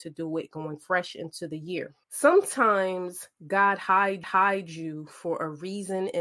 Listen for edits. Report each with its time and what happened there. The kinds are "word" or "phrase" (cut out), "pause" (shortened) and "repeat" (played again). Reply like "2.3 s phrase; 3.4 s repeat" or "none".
2.0 s pause; 4.2 s repeat